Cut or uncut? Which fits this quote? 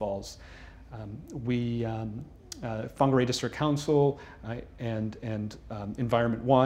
uncut